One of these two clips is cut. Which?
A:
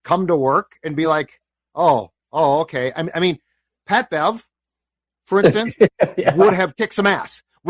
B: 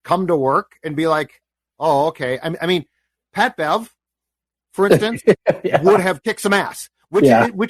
B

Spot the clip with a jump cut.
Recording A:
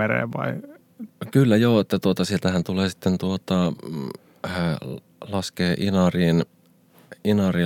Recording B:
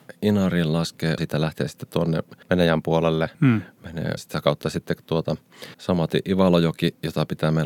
B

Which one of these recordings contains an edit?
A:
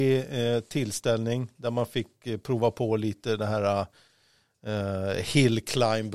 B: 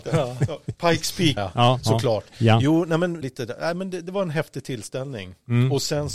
B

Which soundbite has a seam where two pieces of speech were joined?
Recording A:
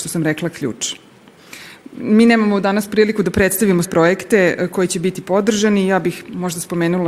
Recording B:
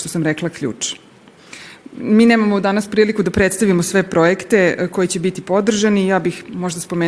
A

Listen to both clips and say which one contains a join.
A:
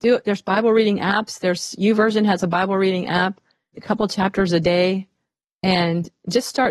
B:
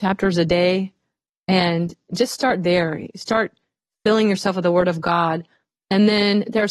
A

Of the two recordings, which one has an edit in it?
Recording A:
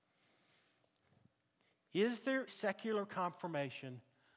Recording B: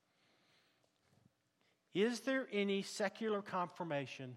A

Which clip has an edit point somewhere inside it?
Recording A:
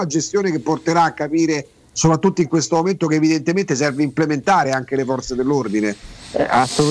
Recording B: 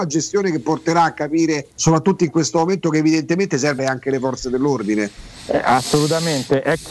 B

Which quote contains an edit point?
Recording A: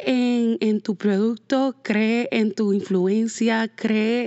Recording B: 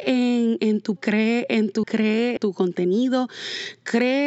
B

